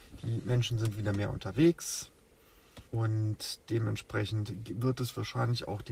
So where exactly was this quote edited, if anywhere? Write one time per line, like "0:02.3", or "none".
0:02.9

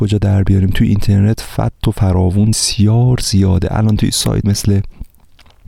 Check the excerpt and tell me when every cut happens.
0:02.5
0:04.4

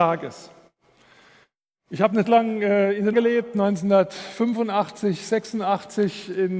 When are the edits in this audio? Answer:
0:02.2
0:03.1

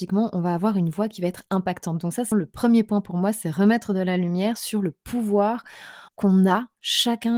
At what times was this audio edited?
0:02.3
0:06.1

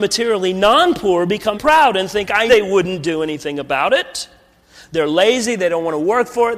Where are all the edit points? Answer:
0:01.5
0:02.5

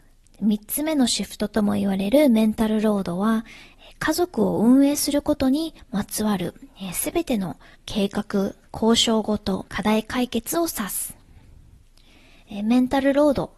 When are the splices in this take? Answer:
0:07.7
0:08.6
0:09.7

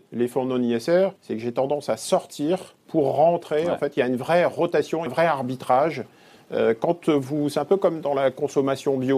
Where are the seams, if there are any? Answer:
0:01.2
0:02.8
0:05.1

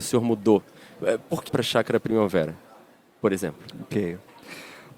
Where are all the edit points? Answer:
0:01.5

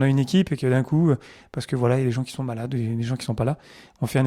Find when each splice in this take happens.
none

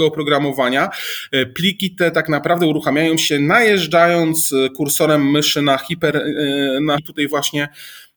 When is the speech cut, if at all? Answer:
0:07.0

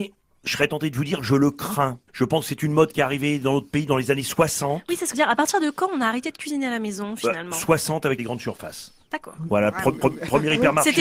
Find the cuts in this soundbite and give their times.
0:02.1
0:05.1
0:08.2
0:10.0

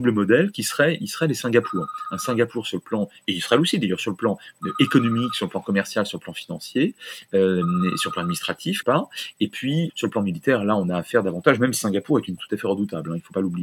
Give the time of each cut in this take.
0:08.8
0:09.9
0:12.4

